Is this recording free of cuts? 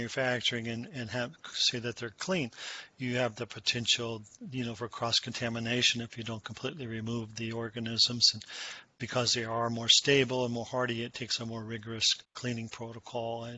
no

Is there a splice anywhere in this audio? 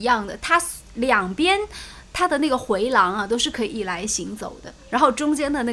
yes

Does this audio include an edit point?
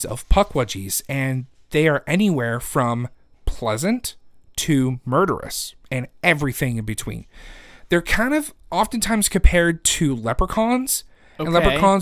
no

